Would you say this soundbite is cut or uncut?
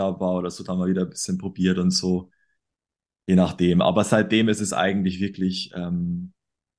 uncut